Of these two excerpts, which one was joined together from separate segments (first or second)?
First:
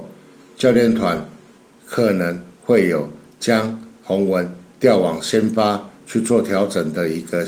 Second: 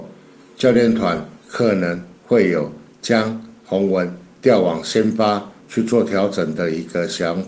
second